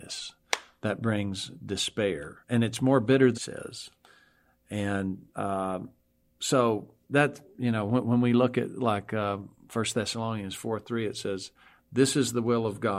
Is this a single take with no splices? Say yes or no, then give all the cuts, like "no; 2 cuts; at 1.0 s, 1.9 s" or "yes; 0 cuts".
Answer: no; 4 cuts; at 2.4 s, 3.3 s, 5.3 s, 7.0 s